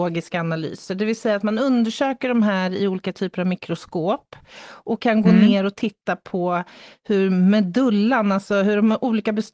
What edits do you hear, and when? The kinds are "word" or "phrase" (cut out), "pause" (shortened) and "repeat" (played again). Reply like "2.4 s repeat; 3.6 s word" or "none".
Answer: none

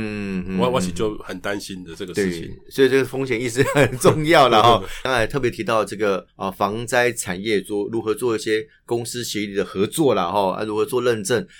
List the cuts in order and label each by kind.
6.3 s pause

